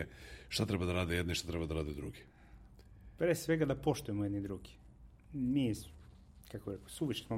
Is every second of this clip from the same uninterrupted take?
yes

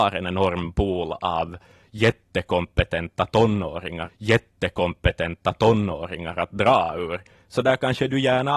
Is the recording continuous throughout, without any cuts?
no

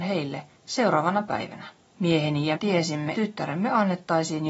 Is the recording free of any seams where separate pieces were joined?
no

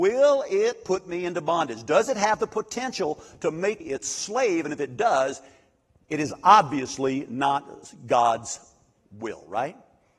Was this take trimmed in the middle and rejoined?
yes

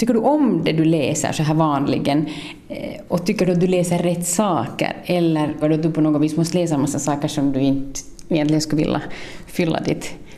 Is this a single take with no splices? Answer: no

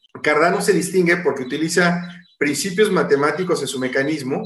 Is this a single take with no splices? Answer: yes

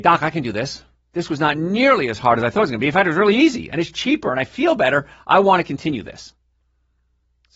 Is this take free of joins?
yes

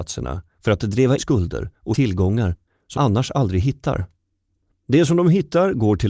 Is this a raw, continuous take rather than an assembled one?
no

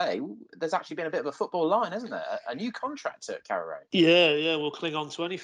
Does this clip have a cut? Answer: yes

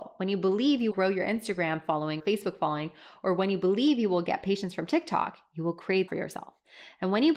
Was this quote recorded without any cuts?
no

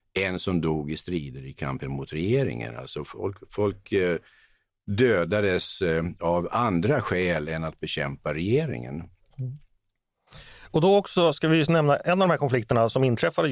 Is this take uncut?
yes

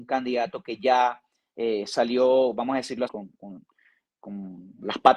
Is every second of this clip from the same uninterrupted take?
no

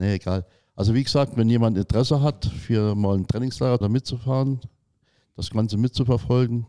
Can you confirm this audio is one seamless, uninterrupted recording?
no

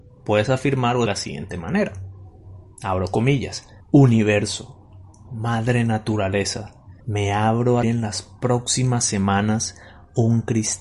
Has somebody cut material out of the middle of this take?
yes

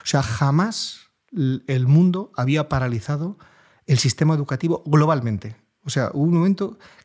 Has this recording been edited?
no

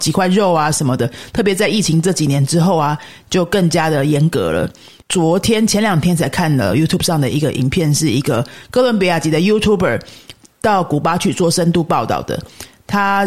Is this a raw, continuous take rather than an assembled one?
yes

